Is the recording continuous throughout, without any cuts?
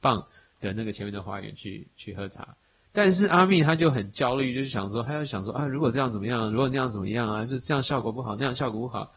yes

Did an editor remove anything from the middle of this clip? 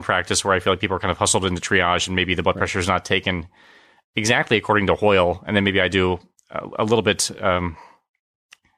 no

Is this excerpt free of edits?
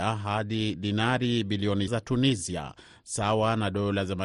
no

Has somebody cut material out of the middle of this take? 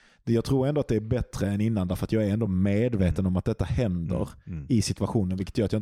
no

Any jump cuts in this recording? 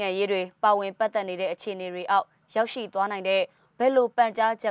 no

